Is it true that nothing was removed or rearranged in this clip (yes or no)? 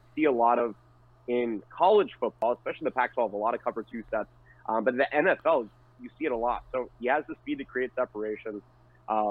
yes